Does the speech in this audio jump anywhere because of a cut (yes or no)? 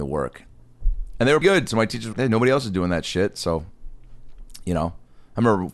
yes